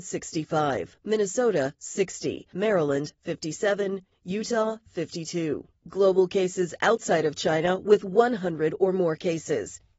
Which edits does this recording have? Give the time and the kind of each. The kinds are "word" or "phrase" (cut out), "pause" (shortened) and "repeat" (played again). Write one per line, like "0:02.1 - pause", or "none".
0:05.8 - pause